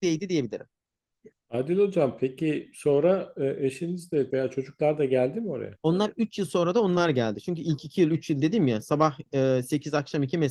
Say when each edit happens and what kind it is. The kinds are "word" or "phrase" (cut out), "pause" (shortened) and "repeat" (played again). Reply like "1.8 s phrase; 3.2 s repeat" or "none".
4.3 s word